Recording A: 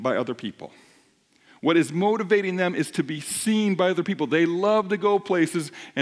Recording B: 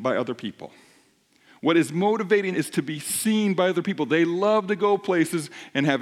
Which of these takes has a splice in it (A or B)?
B